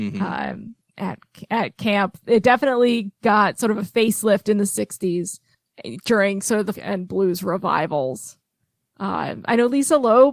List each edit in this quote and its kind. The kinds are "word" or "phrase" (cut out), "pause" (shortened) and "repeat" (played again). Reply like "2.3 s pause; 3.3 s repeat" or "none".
6.7 s word